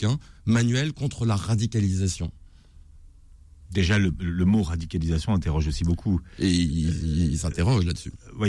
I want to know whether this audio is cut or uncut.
uncut